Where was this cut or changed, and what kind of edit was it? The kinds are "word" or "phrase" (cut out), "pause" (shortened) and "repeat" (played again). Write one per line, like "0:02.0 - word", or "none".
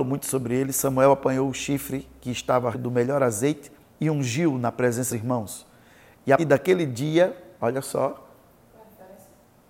0:02.7 - word
0:03.9 - pause
0:05.1 - phrase
0:06.4 - word